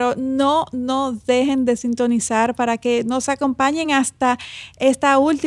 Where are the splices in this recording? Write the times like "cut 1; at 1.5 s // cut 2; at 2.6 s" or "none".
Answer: none